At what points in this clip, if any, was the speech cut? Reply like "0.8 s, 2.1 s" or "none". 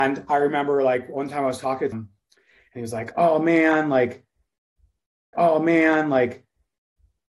1.9 s, 5.3 s